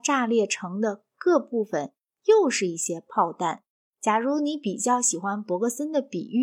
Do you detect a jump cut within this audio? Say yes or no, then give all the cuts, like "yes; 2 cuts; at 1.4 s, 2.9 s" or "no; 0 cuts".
yes; 1 cut; at 3.7 s